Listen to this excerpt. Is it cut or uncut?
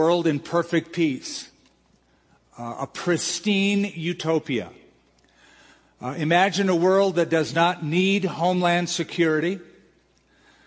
uncut